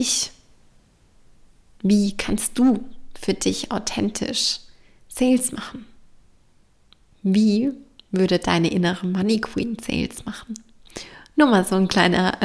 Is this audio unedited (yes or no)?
yes